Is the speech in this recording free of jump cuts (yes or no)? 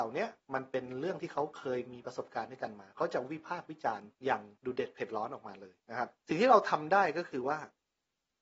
no